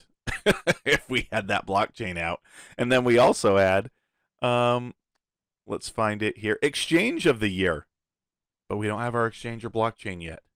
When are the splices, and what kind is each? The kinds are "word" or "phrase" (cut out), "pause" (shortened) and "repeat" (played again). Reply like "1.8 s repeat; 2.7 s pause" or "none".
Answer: none